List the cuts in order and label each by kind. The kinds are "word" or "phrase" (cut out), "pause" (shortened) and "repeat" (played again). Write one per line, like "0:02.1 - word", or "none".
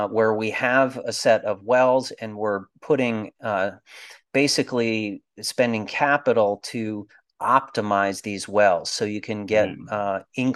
none